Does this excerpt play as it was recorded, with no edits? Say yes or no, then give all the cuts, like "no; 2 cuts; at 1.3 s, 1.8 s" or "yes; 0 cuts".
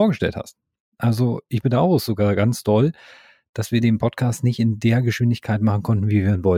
yes; 0 cuts